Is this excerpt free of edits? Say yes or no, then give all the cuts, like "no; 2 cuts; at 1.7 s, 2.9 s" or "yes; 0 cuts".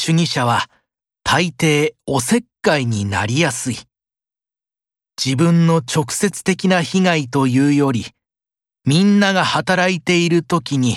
yes; 0 cuts